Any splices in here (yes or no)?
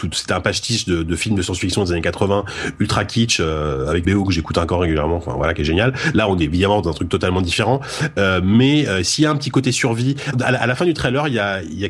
yes